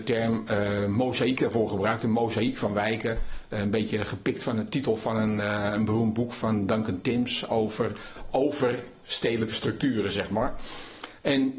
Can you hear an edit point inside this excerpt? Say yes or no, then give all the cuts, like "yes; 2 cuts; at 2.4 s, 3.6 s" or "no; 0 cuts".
no; 0 cuts